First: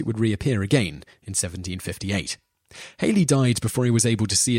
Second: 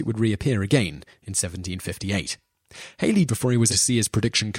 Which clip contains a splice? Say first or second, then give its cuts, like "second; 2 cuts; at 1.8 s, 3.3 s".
second; 2 cuts; at 3.3 s, 3.7 s